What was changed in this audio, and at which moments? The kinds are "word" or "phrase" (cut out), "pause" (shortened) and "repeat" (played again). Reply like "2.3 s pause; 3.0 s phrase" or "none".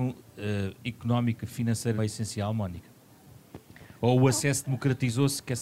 2.0 s word

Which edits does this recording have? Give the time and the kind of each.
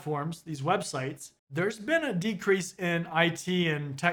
1.4 s pause

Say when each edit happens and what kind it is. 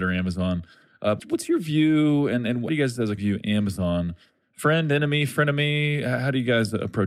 1.2 s word; 2.7 s word; 3.2 s word

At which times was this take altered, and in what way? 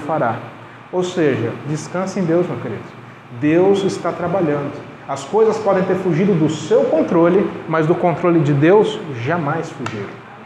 none

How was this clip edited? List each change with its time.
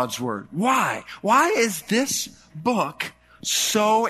none

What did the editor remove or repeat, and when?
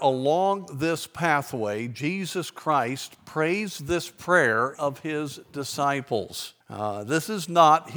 4.7 s phrase; 6.6 s pause

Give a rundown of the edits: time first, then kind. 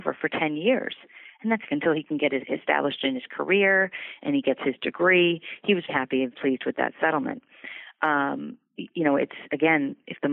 1.7 s word; 5.9 s word; 6.3 s word

